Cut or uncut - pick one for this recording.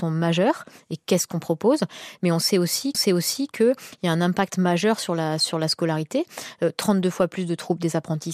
cut